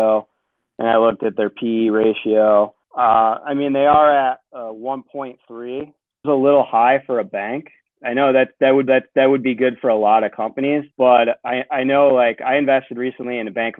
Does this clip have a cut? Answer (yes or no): yes